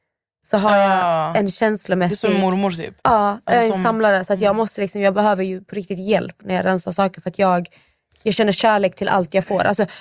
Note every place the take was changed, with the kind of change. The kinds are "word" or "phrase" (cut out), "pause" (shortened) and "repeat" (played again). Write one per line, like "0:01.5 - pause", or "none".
0:03.0 - pause